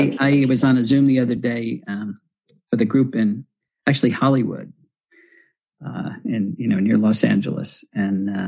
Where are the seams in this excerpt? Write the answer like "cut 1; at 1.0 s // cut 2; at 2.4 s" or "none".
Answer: none